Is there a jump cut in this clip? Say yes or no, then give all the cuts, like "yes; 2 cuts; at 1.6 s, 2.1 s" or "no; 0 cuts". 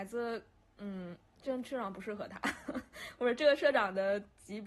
no; 0 cuts